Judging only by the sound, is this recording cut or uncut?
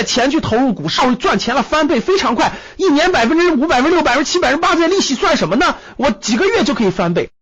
cut